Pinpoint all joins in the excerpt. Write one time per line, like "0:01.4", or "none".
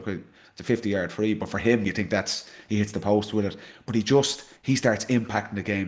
0:04.6